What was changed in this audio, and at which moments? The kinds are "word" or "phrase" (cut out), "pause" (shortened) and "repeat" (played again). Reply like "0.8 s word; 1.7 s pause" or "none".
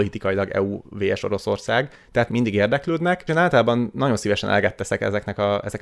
2.3 s word; 3.3 s word